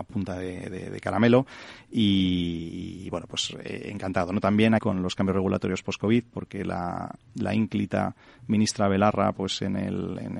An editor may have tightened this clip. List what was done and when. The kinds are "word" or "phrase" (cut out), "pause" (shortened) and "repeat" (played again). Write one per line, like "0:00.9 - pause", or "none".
0:04.8 - word